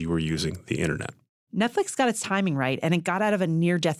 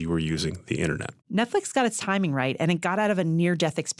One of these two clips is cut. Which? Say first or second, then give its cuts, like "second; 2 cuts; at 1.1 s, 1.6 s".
second; 1 cut; at 1.2 s